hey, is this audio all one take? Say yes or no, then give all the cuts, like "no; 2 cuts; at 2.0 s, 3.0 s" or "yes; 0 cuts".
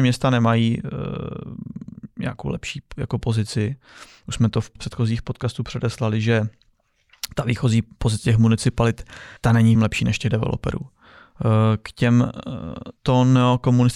no; 4 cuts; at 4.8 s, 9.4 s, 9.7 s, 13.0 s